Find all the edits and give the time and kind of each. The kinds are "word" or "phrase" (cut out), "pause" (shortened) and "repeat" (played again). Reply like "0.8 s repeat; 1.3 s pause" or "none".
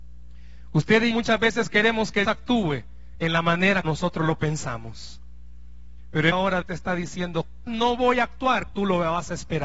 1.1 s word; 2.2 s word; 3.8 s word; 6.3 s word; 6.6 s word; 7.7 s word; 8.7 s word

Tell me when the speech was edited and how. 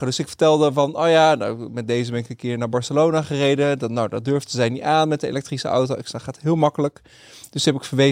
none

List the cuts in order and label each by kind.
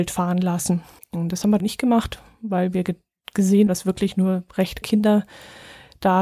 1.0 s pause; 1.6 s phrase; 3.7 s word; 4.8 s word

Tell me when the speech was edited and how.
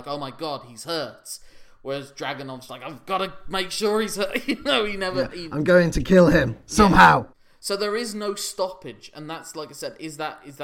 2.7 s word

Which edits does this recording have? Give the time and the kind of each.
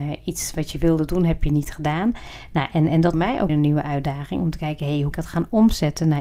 3.1 s phrase; 3.5 s word; 5.1 s phrase

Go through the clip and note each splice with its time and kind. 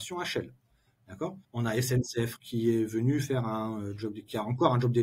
1.4 s pause; 2.4 s word

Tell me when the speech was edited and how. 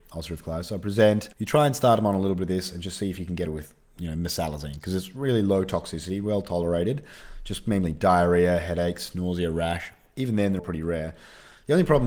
1.3 s pause; 3.5 s word; 10.6 s word

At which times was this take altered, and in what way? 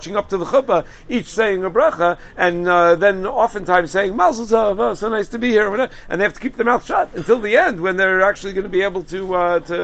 none

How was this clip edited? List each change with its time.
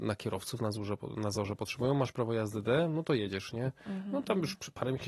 none

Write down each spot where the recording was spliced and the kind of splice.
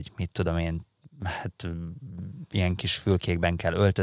none

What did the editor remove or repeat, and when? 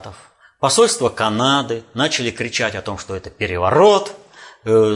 none

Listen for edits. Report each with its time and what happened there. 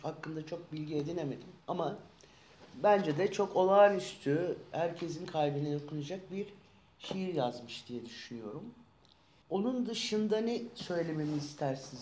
1.6 s pause

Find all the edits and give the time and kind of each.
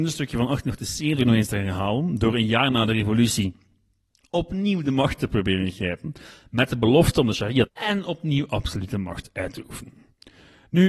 7.7 s phrase

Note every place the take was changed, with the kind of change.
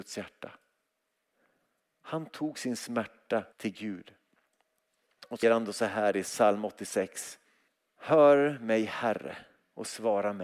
3.5 s pause; 5.4 s word; 7.7 s pause

